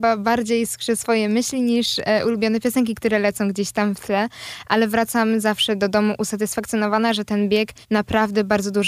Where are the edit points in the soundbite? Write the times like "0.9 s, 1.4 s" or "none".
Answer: 7.8 s